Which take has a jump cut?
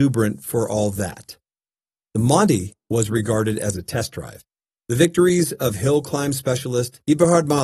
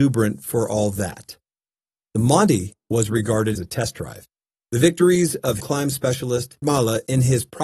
second; 3 cuts; at 3.6 s, 5.6 s, 6.6 s

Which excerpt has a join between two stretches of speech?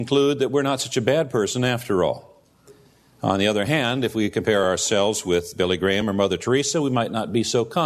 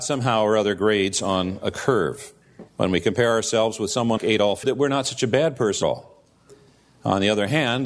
second; 4 cuts; at 2.7 s, 4.2 s, 4.6 s, 5.8 s

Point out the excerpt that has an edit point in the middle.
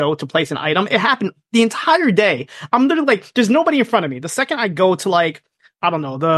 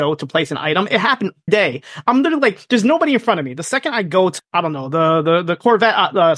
second; 2 cuts; at 1.5 s, 4.4 s

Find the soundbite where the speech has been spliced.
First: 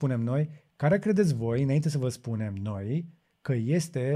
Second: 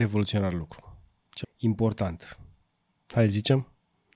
second; 1 cut; at 1.4 s

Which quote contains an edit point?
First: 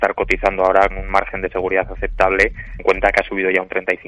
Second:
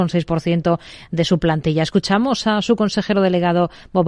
first; 2 cuts; at 0.9 s, 2.8 s

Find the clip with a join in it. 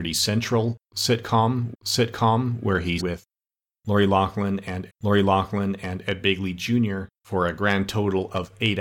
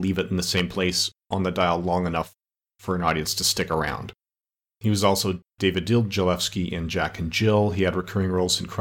first; 4 cuts; at 1.7 s, 3.0 s, 4.9 s, 7.2 s

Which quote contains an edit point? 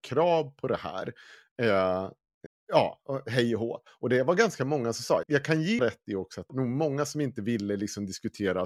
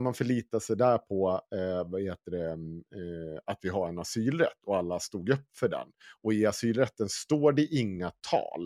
first; 4 cuts; at 2.5 s, 5.2 s, 5.8 s, 6.5 s

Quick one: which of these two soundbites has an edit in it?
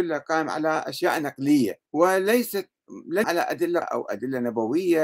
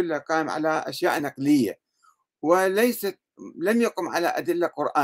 first; 3 cuts; at 1.9 s, 3.2 s, 3.8 s

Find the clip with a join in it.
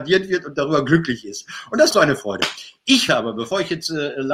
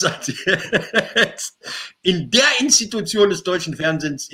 first; 2 cuts; at 1.9 s, 3.1 s

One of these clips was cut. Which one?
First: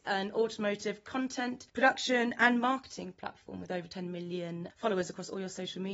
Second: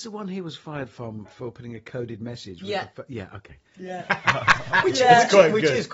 first; 1 cut; at 1.7 s

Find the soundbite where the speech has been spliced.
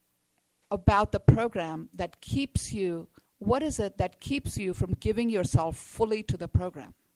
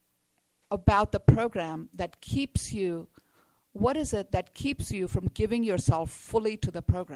first; 1 cut; at 3.3 s

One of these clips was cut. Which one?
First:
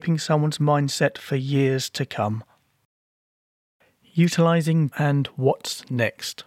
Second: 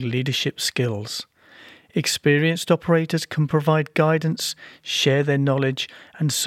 first; 1 cut; at 4.9 s

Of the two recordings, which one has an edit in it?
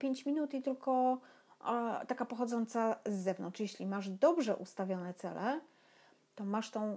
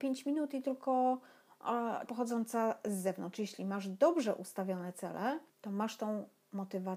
second; 2 cuts; at 2.1 s, 5.5 s

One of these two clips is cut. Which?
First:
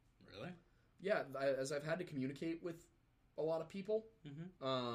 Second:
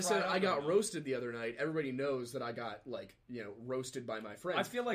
second; 1 cut; at 3.2 s

